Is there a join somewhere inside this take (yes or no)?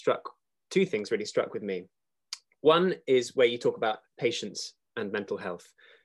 no